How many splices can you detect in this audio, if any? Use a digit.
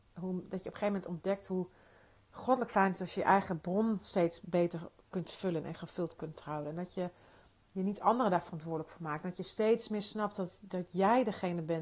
0